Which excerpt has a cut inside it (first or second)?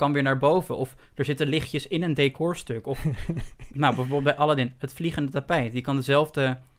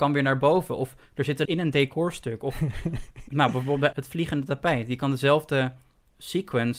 second